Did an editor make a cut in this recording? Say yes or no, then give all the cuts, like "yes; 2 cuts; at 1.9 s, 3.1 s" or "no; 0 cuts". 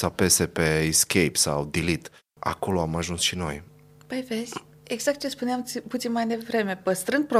no; 0 cuts